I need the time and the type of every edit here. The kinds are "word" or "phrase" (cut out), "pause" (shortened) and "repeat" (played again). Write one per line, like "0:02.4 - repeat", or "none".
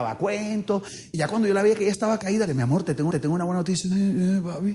0:01.1 - word
0:02.5 - phrase
0:03.1 - repeat